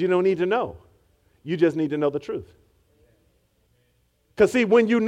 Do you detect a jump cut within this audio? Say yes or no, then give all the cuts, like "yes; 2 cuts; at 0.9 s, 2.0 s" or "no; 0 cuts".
no; 0 cuts